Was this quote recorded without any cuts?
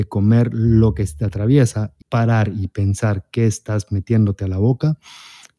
no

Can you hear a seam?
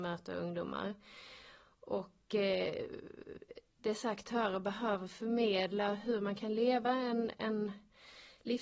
no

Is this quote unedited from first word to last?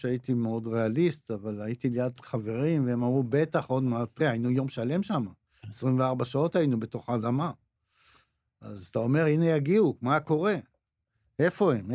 yes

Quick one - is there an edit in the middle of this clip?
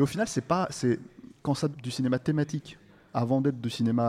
yes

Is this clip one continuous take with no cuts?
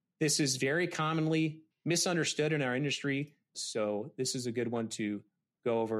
no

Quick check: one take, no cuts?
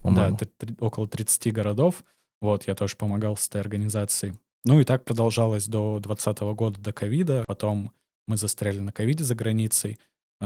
yes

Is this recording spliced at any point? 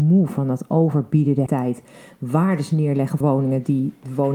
yes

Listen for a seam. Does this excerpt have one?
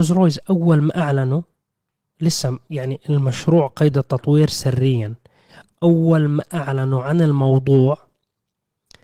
no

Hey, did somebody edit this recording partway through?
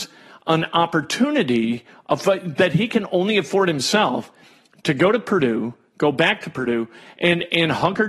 no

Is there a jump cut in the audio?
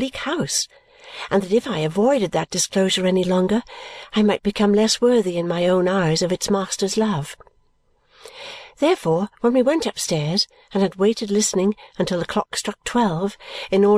no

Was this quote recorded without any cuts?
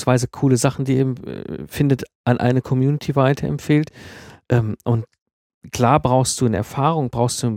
yes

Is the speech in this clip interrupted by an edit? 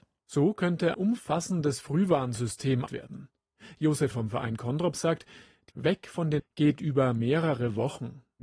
yes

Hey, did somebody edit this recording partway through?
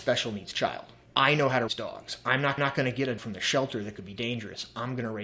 yes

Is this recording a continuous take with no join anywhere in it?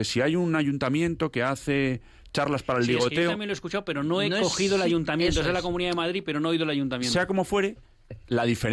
yes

